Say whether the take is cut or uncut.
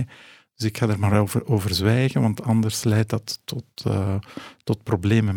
uncut